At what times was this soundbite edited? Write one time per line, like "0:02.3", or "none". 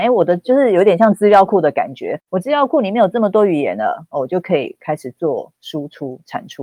none